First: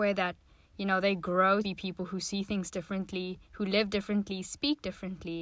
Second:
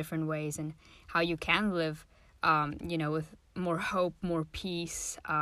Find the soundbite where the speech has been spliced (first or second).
first